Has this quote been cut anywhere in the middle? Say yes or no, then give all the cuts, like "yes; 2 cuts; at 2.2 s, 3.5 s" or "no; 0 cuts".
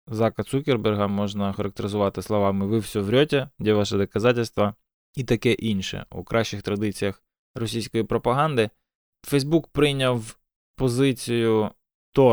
no; 0 cuts